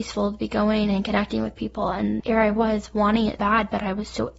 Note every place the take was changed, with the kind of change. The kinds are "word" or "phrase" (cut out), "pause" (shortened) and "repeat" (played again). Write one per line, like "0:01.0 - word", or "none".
0:02.2 - word
0:03.4 - word